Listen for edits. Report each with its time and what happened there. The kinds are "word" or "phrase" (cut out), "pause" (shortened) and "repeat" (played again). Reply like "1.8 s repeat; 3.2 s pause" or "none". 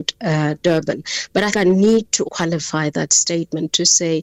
1.5 s word; 2.2 s word